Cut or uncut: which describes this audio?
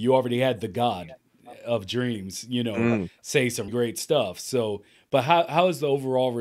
cut